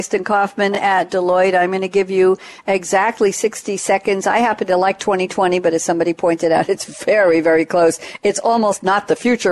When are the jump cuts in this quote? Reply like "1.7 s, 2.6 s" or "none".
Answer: none